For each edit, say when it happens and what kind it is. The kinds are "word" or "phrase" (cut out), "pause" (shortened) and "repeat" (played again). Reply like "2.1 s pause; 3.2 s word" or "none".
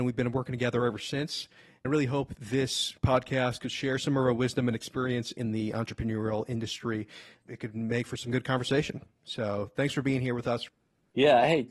none